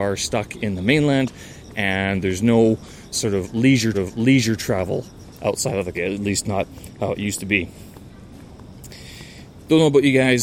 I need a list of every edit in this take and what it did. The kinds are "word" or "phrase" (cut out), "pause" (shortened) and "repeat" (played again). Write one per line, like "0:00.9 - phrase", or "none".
0:03.1 - word
0:03.9 - repeat
0:05.9 - word